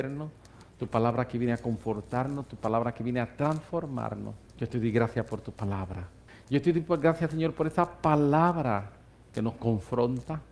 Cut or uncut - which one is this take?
uncut